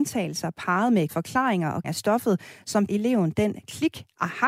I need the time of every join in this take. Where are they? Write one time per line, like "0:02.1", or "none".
0:01.1
0:01.8
0:02.9